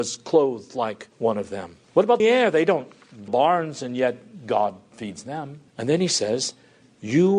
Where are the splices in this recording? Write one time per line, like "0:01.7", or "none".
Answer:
0:01.1
0:01.8
0:02.2
0:03.3
0:05.7